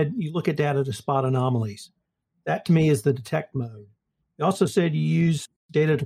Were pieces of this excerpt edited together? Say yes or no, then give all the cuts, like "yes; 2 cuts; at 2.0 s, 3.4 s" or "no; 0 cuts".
no; 0 cuts